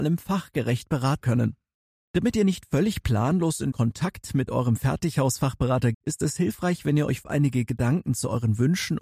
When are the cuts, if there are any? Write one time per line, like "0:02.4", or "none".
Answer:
0:01.2
0:03.7
0:05.9
0:07.2